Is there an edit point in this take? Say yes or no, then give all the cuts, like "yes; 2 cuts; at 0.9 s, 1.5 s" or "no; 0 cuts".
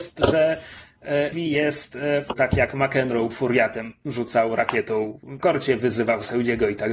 yes; 4 cuts; at 1.3 s, 2.3 s, 3.3 s, 5.4 s